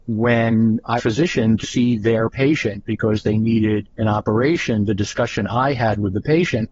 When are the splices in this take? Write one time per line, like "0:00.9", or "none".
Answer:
0:01.0
0:01.6
0:03.9